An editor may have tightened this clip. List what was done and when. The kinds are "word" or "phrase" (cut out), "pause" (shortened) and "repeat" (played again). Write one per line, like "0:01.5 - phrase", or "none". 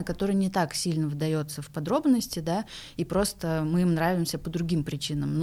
none